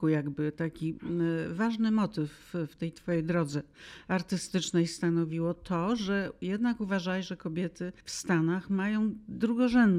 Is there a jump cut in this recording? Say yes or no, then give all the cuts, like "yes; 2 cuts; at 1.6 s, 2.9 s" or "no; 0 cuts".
yes; 1 cut; at 8.0 s